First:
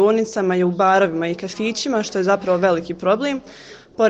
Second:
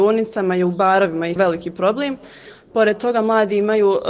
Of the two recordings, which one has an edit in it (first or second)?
second